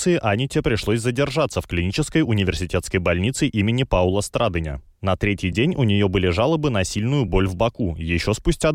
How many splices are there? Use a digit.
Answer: 0